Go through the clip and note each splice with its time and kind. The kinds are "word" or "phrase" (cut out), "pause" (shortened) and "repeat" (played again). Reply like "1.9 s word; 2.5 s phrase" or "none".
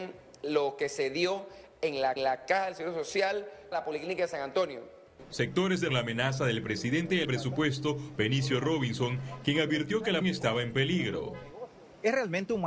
2.2 s repeat; 3.7 s word; 5.9 s phrase; 7.2 s phrase; 10.2 s word